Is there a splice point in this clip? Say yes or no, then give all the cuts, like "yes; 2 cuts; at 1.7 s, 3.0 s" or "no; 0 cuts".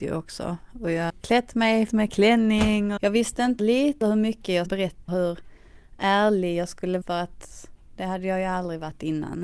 yes; 8 cuts; at 1.1 s, 1.9 s, 3.0 s, 3.6 s, 4.0 s, 4.7 s, 5.1 s, 7.0 s